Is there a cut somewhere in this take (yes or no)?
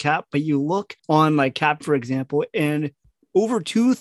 yes